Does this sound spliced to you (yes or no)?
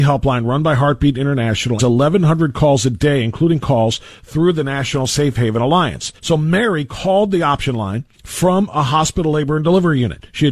yes